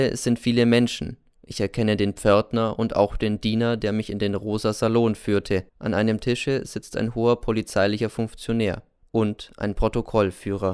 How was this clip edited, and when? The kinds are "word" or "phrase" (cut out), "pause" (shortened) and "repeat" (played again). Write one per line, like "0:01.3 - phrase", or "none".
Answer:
0:05.7 - pause
0:09.0 - pause